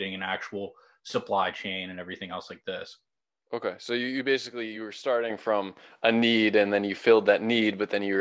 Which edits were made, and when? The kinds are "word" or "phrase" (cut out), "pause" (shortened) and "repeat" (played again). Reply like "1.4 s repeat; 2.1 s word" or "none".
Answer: none